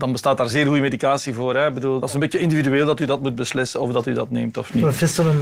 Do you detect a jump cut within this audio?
no; 0 cuts

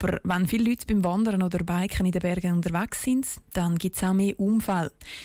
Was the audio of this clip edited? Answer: no; 0 cuts

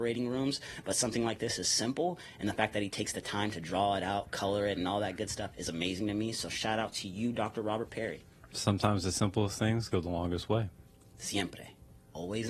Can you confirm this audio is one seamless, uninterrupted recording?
yes; 0 cuts

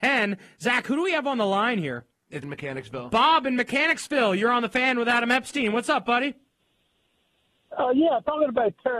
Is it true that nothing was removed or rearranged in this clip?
no; 1 cut; at 2.4 s

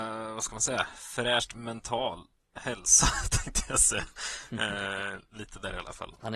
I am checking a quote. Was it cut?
no; 0 cuts

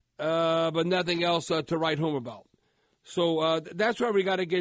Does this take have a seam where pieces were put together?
no; 0 cuts

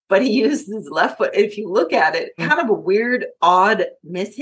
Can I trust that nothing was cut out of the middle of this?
no; 1 cut; at 2.4 s

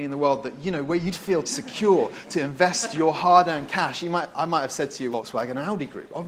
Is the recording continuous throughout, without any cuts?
no; 2 cuts; at 1.4 s, 5.1 s

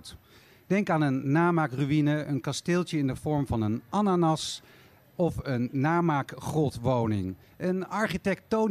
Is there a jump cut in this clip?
no; 0 cuts

